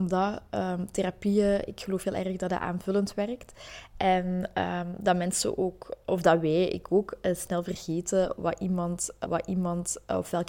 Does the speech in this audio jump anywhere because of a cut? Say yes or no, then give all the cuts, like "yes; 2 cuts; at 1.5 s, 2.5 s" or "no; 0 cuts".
yes; 1 cut; at 9.2 s